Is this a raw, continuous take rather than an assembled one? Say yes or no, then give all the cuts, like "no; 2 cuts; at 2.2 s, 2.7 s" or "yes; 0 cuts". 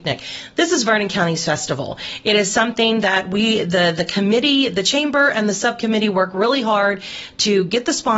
yes; 0 cuts